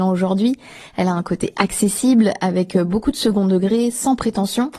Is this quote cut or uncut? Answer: uncut